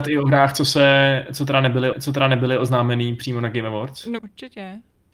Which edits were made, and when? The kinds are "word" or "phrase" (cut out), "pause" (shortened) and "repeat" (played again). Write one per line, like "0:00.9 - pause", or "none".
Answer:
0:01.9 - repeat
0:04.2 - word